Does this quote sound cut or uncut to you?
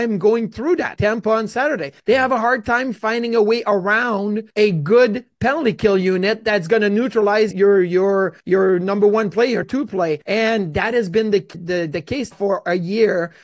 cut